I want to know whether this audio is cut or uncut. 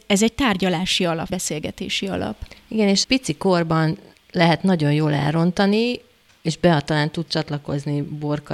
cut